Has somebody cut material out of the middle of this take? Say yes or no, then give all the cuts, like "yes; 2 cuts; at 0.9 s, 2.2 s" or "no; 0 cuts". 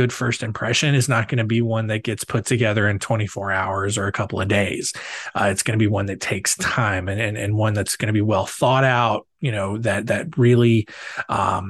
no; 0 cuts